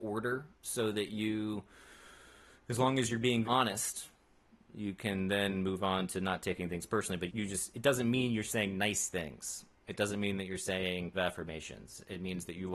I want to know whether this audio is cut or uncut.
cut